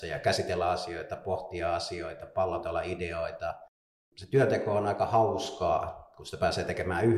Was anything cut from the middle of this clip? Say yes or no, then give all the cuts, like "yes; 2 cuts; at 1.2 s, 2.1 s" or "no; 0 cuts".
no; 0 cuts